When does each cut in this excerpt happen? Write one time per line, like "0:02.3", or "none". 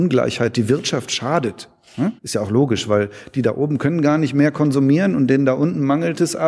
0:02.2